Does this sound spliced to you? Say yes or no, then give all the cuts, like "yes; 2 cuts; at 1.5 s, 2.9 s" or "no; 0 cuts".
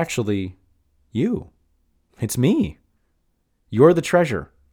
no; 0 cuts